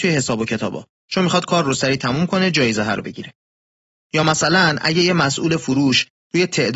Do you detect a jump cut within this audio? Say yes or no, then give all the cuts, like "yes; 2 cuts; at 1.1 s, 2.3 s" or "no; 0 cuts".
no; 0 cuts